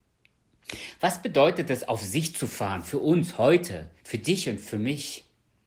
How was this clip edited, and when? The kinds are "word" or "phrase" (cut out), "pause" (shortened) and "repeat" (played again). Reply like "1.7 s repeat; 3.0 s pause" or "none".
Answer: 4.0 s pause

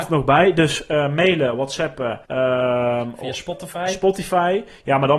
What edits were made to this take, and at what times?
2.2 s pause

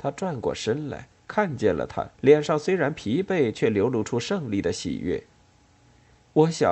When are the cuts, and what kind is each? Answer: 2.1 s pause

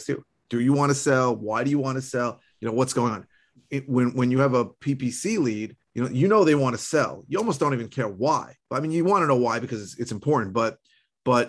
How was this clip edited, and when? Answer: 3.5 s pause; 5.8 s pause; 8.6 s pause

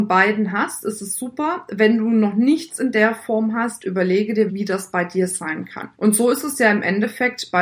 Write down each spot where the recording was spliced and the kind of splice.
4.5 s word; 5.9 s pause

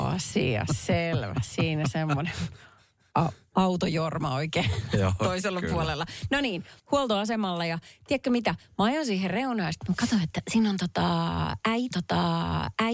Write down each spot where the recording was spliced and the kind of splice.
6.8 s pause; 11.9 s repeat

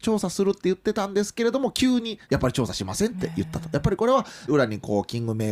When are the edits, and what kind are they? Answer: 2.2 s pause; 4.5 s phrase

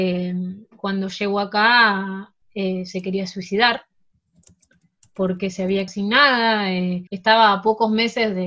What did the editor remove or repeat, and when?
2.4 s pause; 5.9 s word; 7.1 s pause

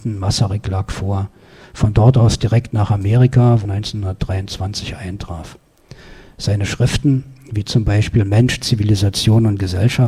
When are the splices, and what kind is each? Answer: 3.6 s word

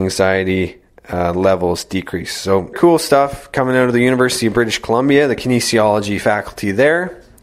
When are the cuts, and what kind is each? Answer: 2.7 s word

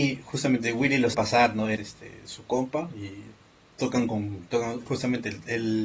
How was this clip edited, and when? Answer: 1.1 s word; 1.8 s word; 4.9 s word

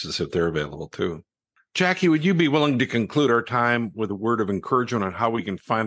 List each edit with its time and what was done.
none

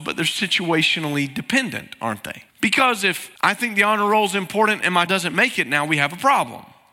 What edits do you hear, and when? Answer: 2.5 s pause; 3.4 s pause; 5.1 s word

